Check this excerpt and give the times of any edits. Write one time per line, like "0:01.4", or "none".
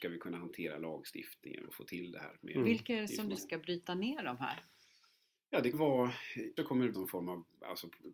0:01.7
0:03.4
0:05.7
0:06.6
0:06.9